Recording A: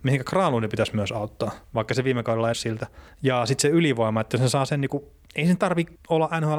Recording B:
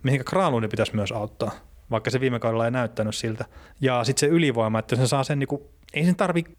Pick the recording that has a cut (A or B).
A